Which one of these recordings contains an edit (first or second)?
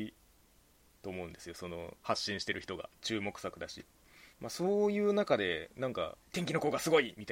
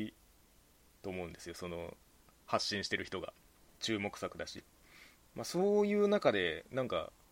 first